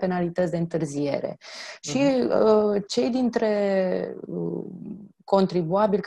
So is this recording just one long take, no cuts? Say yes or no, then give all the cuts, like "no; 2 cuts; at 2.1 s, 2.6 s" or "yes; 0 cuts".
yes; 0 cuts